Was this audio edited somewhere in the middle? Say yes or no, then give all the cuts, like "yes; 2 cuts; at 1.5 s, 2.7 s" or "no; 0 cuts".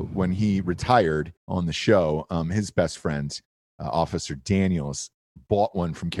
yes; 1 cut; at 1.4 s